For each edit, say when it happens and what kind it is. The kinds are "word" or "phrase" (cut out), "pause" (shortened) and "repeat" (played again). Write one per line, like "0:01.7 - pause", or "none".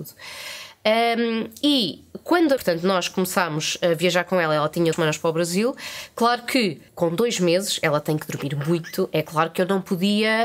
0:02.6 - phrase
0:04.9 - phrase
0:06.9 - pause